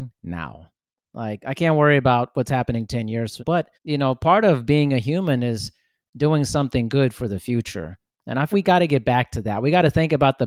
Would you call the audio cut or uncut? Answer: cut